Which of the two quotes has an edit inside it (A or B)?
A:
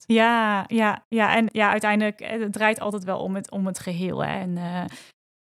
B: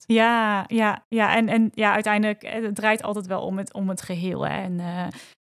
A